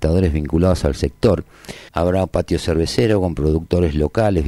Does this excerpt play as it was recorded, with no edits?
no; 1 cut; at 1.9 s

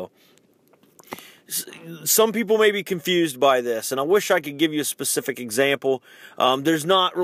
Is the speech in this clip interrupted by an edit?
no; 0 cuts

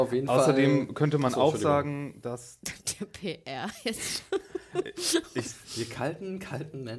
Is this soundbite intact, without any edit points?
yes; 0 cuts

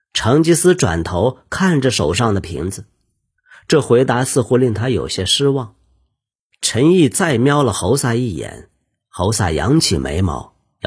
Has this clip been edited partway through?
no; 0 cuts

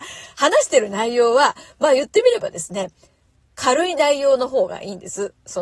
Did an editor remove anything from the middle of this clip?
no; 0 cuts

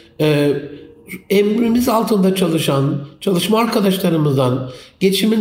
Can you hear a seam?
no; 0 cuts

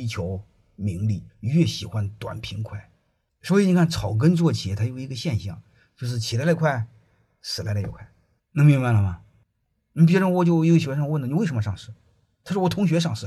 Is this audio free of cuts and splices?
no; 2 cuts; at 1.3 s, 8.4 s

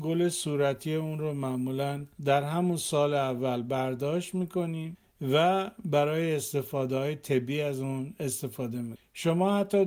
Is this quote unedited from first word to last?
no; 1 cut; at 2.1 s

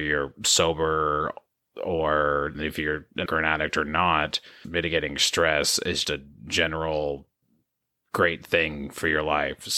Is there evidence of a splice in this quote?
yes; 4 cuts; at 2.5 s, 3.3 s, 4.6 s, 6.0 s

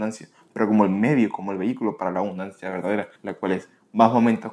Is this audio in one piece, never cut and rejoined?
no; 1 cut; at 3.2 s

